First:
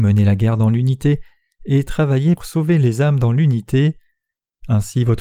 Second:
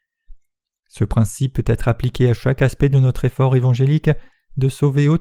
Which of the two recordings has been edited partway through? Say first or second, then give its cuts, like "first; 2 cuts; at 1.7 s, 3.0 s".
first; 1 cut; at 2.4 s